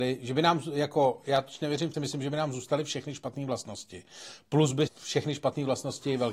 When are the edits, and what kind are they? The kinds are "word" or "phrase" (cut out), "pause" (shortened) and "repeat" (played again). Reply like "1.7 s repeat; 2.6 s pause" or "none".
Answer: 1.9 s phrase; 4.9 s phrase